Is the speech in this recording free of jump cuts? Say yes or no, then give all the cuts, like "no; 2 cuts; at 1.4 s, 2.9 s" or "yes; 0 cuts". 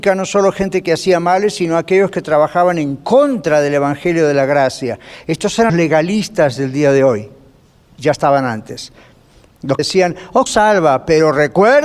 no; 3 cuts; at 5.7 s, 9.8 s, 10.5 s